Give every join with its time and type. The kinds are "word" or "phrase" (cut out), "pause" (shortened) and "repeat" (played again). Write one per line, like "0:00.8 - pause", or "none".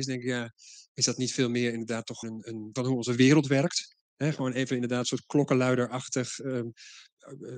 0:02.2 - word
0:02.8 - phrase
0:04.1 - pause